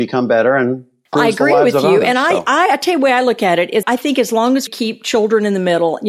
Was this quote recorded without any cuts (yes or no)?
no